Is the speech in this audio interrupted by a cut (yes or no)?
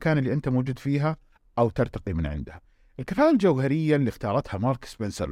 no